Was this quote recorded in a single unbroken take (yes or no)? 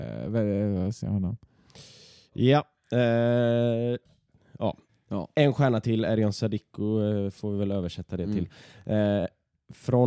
no